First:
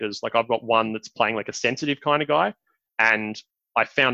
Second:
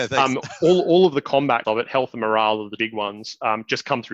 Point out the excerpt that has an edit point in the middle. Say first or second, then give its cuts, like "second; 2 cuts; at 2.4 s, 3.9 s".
second; 2 cuts; at 1.6 s, 2.8 s